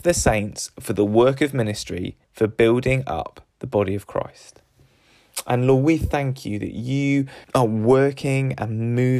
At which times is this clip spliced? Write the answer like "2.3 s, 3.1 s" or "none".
2.2 s, 3.5 s, 7.4 s